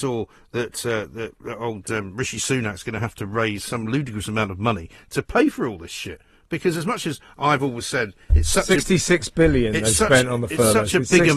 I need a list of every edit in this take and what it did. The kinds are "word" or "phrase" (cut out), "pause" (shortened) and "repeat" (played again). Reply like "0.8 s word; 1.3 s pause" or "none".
none